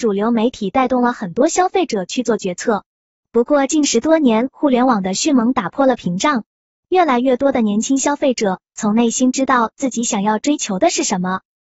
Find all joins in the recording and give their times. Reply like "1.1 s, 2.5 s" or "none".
none